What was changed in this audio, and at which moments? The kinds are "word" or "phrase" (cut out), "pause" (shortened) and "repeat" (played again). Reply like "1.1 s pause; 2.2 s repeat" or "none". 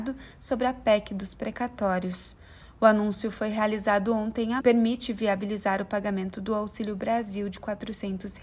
4.6 s phrase